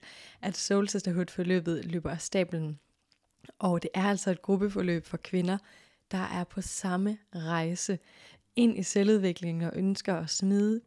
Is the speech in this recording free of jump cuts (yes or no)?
yes